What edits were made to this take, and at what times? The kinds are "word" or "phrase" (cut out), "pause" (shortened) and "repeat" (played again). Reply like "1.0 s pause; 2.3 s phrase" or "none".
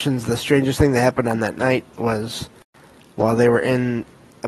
1.9 s pause